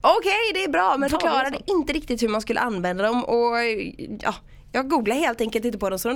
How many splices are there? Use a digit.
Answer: 1